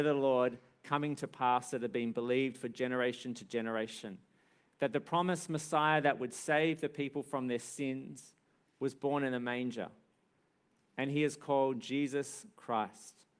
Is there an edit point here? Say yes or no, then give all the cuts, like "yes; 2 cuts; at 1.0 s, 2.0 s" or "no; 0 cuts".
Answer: no; 0 cuts